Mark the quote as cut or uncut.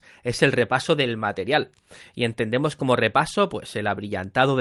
uncut